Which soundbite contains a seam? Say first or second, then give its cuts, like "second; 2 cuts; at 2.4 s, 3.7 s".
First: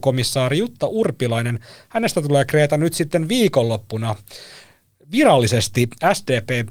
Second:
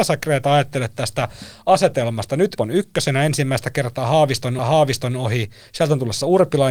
second; 2 cuts; at 2.6 s, 4.6 s